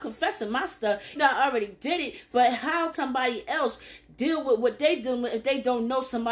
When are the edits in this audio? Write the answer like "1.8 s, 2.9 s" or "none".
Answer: 1.2 s, 2.9 s